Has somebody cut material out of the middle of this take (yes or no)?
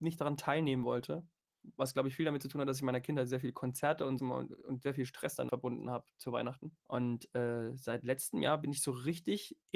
yes